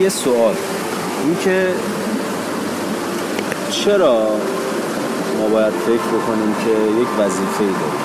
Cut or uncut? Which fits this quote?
uncut